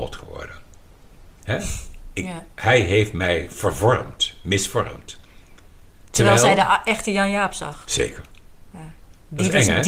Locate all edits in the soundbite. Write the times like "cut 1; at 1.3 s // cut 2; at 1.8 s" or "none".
cut 1; at 2.5 s // cut 2; at 6.1 s // cut 3; at 8.7 s